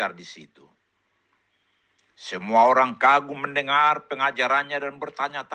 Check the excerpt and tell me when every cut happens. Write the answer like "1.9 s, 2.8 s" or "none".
none